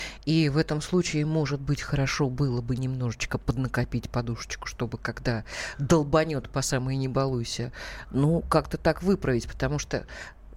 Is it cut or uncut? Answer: uncut